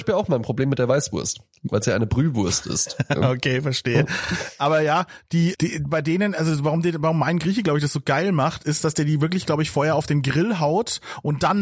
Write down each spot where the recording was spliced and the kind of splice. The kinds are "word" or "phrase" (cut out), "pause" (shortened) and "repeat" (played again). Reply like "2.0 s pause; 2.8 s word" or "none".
5.5 s word